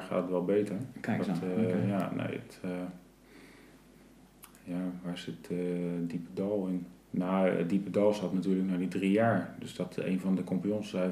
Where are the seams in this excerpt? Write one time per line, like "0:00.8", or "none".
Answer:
0:07.0